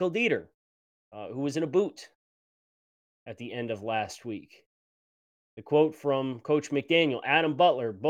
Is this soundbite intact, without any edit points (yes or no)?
yes